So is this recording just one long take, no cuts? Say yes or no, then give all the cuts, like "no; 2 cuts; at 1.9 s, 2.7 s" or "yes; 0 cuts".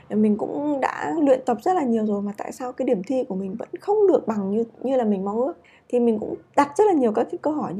no; 1 cut; at 5.6 s